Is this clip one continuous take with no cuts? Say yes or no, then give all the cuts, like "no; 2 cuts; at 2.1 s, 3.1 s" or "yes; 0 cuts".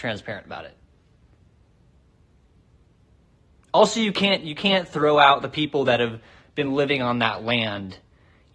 yes; 0 cuts